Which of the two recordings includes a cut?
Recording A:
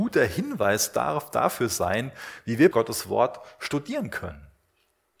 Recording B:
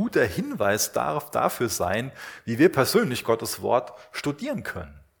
A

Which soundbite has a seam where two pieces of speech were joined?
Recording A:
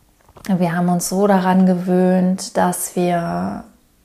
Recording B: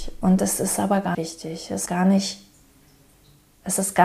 B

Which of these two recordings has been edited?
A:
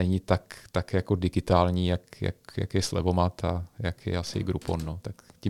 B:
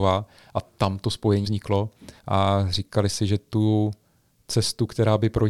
B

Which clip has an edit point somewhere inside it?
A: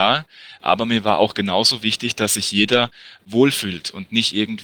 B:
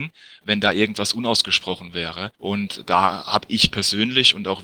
B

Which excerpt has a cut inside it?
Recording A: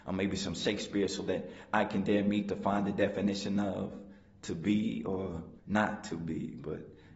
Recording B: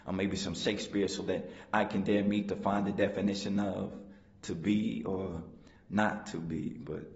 A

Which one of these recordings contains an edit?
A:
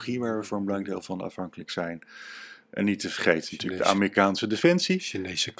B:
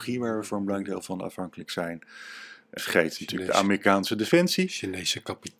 B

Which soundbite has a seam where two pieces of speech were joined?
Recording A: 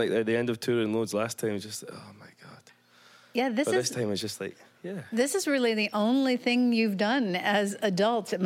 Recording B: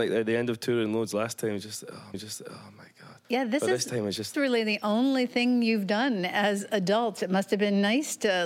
B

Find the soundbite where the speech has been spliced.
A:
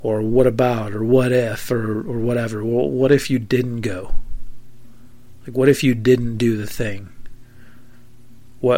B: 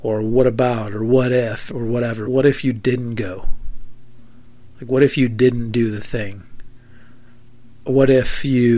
B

